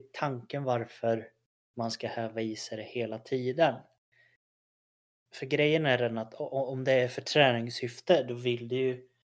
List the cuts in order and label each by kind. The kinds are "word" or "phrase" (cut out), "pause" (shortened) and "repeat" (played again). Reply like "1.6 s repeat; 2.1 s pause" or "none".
none